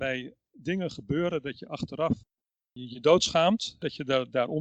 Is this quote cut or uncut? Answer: uncut